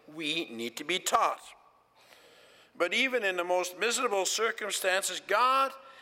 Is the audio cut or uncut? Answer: uncut